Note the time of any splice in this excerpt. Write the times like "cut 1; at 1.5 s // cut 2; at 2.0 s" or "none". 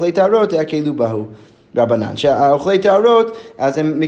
none